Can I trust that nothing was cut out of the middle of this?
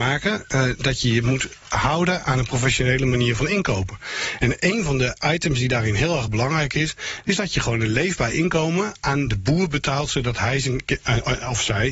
yes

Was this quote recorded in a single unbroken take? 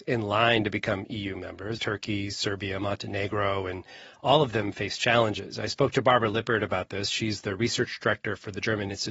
no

